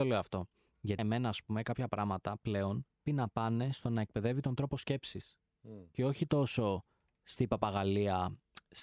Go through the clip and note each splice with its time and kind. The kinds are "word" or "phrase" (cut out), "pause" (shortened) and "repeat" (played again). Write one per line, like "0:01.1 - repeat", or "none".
0:01.0 - word
0:03.1 - word

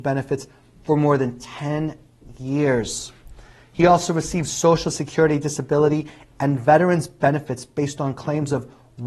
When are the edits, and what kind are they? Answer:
none

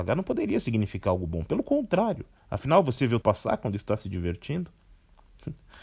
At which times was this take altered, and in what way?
0:02.4 - pause
0:03.2 - word

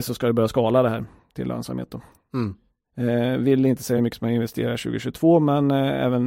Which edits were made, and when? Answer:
none

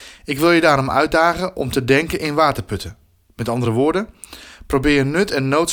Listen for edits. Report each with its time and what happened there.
none

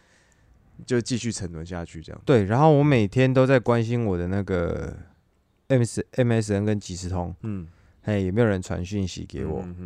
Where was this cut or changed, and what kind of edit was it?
none

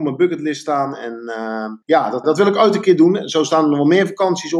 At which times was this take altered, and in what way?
0:01.8 - pause
0:02.2 - word

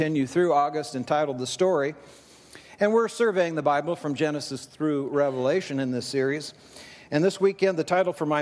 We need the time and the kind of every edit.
none

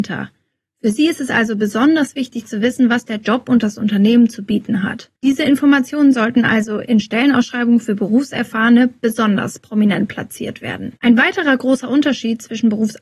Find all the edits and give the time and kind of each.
0:05.2 - pause
0:11.0 - pause

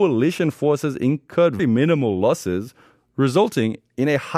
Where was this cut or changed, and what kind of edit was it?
0:01.6 - word

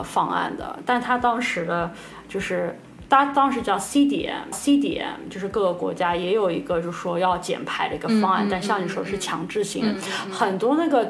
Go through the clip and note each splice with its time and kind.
0:04.5 - repeat
0:10.0 - phrase

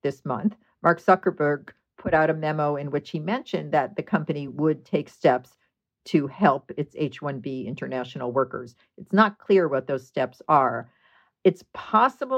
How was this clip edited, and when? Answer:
none

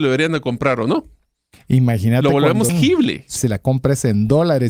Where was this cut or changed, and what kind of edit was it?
0:02.7 - word
0:03.4 - word

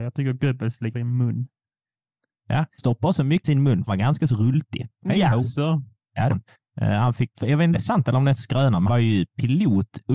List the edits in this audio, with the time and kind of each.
0:00.9 - word
0:02.8 - word
0:03.4 - word
0:03.9 - word
0:06.3 - word
0:07.3 - word
0:07.7 - word
0:08.9 - word

